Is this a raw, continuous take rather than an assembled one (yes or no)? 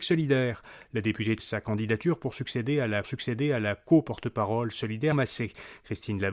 no